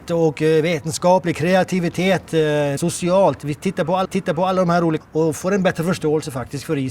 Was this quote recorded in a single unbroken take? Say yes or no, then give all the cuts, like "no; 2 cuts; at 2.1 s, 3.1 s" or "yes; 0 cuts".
no; 3 cuts; at 2.8 s, 4.1 s, 5.0 s